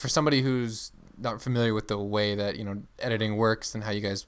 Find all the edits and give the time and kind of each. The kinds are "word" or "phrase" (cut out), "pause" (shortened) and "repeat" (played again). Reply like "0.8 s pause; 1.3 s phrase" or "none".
2.9 s pause